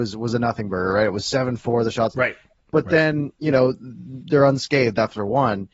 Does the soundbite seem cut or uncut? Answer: cut